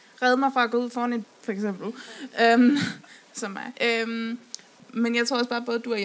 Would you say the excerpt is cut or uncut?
cut